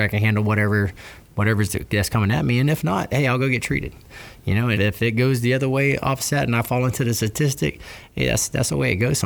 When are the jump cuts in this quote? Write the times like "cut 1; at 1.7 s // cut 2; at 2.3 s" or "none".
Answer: cut 1; at 4.7 s